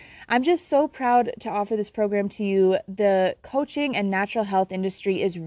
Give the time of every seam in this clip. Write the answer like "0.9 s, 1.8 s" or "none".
none